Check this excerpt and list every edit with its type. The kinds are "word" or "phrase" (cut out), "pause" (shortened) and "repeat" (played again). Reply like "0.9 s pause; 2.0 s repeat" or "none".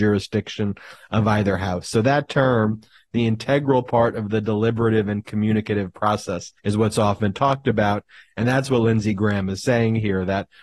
6.6 s pause